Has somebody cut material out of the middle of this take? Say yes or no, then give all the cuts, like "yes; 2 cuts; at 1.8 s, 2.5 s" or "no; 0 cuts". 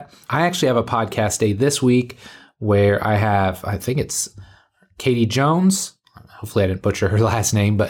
no; 0 cuts